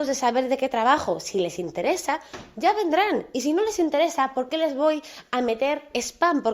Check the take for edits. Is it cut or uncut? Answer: uncut